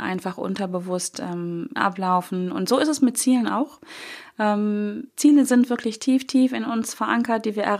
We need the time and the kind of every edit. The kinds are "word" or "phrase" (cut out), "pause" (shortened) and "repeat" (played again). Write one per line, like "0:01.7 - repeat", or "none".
0:01.8 - phrase
0:05.1 - word